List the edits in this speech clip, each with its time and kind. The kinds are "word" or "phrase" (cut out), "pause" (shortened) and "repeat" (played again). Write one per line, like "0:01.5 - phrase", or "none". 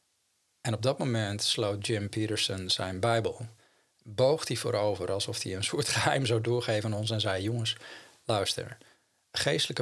none